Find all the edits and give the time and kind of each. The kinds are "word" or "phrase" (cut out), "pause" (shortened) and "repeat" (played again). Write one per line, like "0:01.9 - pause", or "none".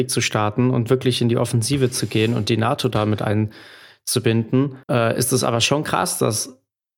0:04.8 - pause